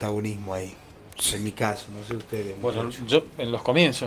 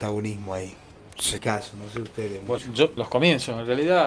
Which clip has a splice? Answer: second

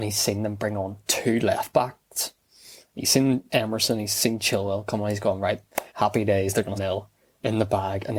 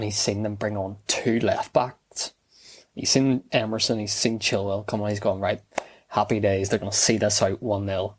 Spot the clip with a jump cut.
first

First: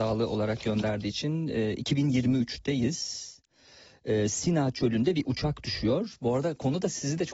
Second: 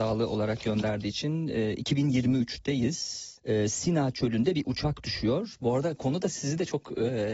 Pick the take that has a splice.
second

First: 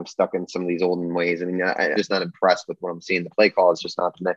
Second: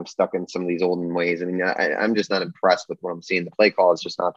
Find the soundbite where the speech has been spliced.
first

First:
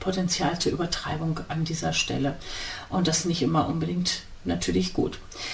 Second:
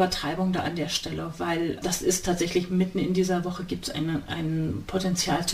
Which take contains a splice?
second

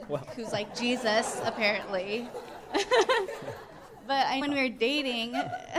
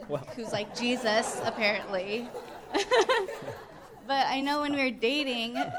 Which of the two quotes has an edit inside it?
first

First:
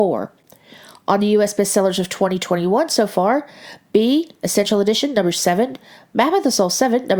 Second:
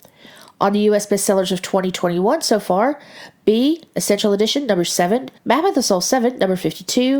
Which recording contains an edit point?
second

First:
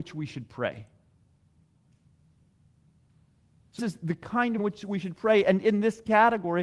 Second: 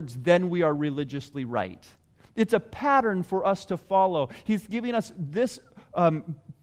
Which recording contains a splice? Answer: first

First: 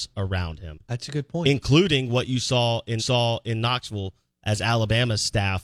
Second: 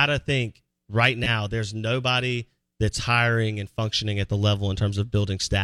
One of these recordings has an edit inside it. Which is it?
first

